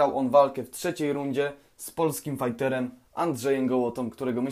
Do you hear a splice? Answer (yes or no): no